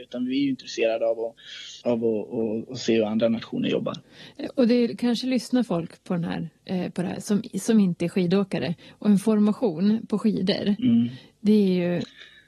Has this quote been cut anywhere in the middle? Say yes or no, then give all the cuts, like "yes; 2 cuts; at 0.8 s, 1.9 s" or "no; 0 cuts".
yes; 1 cut; at 1.8 s